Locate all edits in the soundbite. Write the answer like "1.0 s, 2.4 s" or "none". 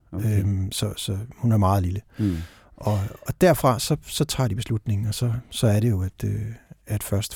none